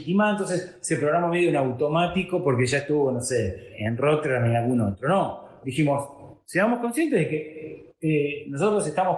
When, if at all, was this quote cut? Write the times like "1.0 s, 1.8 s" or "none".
none